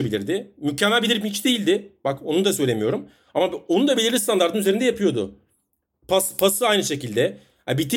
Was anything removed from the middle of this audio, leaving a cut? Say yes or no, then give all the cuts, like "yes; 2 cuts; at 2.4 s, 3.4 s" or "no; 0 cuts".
no; 0 cuts